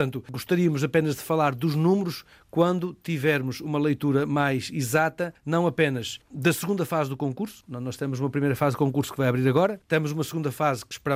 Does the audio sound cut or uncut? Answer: uncut